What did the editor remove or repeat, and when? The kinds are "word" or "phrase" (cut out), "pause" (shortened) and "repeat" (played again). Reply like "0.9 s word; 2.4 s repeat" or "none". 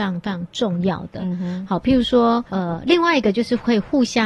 2.5 s pause